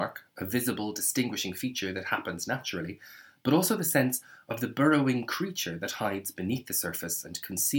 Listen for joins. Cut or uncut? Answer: uncut